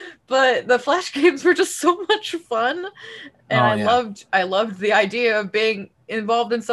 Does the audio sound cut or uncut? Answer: cut